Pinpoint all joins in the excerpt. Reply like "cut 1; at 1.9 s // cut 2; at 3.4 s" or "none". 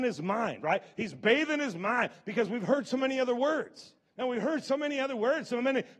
cut 1; at 4.0 s

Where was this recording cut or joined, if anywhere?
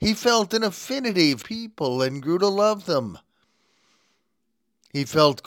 cut 1; at 1.4 s

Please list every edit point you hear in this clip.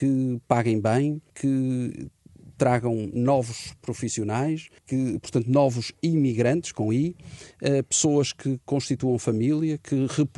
cut 1; at 1.3 s // cut 2; at 4.8 s

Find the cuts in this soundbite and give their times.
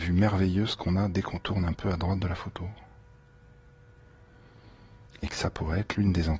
cut 1; at 5.1 s

